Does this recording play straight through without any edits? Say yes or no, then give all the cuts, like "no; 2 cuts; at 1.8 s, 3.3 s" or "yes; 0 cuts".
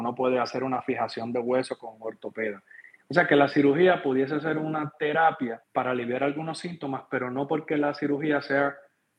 no; 1 cut; at 5.6 s